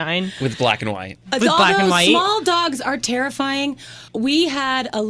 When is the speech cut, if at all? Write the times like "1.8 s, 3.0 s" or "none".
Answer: 4.1 s